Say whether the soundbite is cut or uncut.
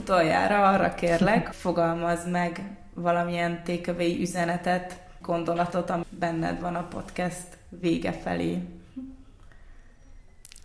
cut